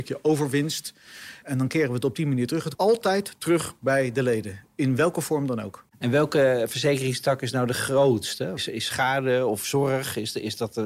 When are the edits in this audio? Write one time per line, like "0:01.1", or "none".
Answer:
0:02.7